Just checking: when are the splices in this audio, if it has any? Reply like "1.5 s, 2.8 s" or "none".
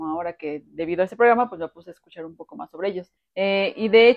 3.2 s